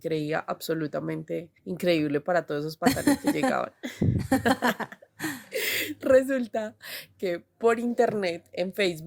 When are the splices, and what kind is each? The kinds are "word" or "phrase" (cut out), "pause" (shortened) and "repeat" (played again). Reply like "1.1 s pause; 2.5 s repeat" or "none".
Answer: 1.6 s pause